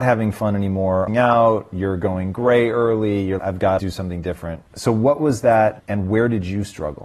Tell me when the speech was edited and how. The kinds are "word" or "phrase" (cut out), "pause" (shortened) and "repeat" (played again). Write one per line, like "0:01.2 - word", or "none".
0:01.1 - phrase
0:03.4 - word
0:03.8 - word
0:04.7 - pause
0:05.8 - phrase

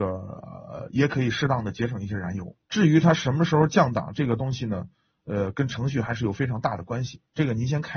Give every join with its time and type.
0:02.6 - pause

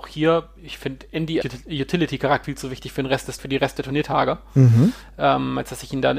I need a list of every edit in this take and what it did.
0:01.4 - word
0:02.4 - word
0:03.4 - word

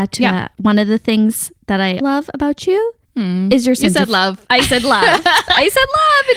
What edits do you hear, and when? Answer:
0:02.0 - word
0:03.0 - pause

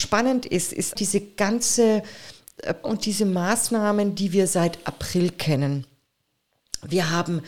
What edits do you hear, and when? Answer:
0:01.0 - word
0:02.8 - word

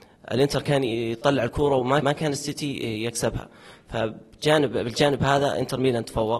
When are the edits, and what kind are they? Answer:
0:02.0 - word

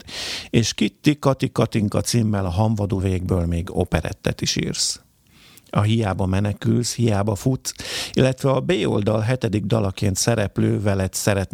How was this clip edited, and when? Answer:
0:03.0 - word

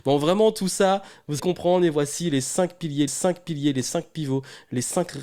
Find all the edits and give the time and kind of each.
0:01.4 - word
0:03.1 - repeat

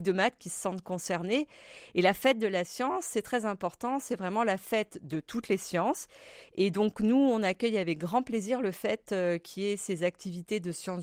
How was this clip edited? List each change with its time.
none

